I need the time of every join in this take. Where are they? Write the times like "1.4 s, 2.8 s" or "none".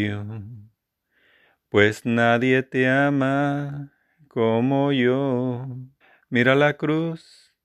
6.0 s